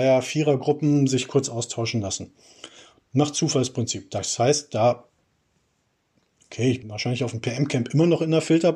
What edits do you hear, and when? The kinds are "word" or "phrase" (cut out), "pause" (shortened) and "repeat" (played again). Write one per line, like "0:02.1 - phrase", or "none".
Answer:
0:06.8 - word